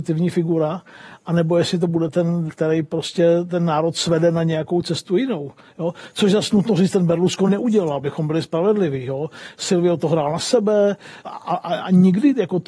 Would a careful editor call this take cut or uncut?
cut